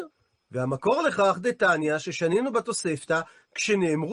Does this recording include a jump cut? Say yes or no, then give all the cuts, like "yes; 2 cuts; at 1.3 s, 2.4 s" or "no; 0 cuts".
no; 0 cuts